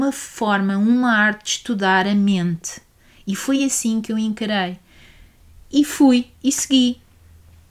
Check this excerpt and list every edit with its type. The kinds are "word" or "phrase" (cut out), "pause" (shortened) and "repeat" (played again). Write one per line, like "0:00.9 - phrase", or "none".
none